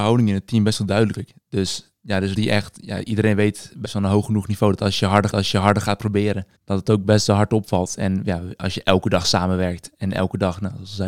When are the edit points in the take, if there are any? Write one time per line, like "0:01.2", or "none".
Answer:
0:01.1
0:02.4
0:03.8
0:05.3
0:06.5

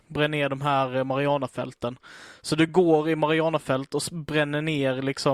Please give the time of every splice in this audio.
none

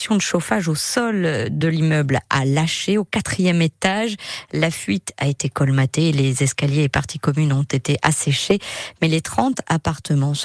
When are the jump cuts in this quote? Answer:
none

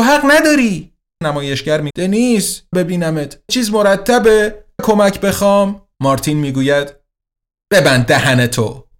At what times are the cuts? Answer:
0:01.2
0:01.9
0:02.7
0:03.5
0:04.8
0:05.9

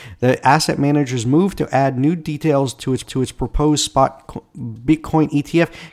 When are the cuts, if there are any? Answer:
0:03.0

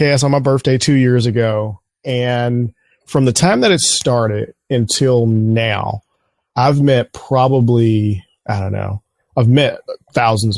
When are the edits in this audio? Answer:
none

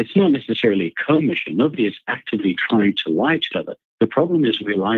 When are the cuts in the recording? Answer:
0:03.5

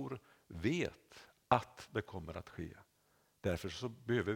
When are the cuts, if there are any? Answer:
none

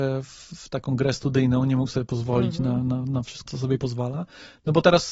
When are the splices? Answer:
0:03.5
0:03.8

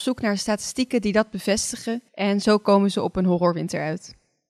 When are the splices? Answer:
0:02.1

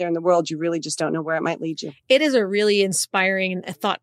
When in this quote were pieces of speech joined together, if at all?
none

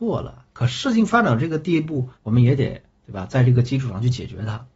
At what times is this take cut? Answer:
0:02.1

